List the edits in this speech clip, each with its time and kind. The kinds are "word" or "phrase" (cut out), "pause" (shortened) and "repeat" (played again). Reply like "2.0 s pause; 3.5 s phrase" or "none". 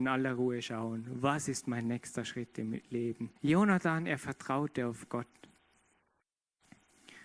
3.4 s pause